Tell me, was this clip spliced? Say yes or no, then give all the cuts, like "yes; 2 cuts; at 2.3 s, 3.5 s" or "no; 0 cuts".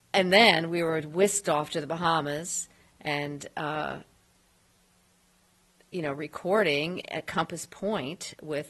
no; 0 cuts